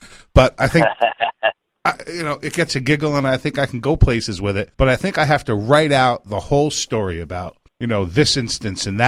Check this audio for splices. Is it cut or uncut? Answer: cut